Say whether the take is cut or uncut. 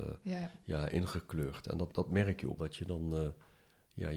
cut